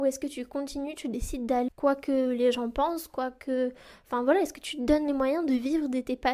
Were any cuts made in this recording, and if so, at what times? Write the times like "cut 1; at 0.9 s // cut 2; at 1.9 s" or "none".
cut 1; at 1.7 s